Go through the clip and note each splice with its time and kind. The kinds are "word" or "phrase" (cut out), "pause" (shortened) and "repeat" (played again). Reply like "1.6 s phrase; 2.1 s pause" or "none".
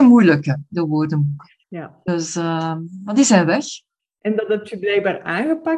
1.6 s pause; 4.0 s pause